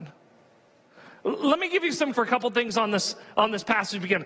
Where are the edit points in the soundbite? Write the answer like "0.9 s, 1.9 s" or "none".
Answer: 2.1 s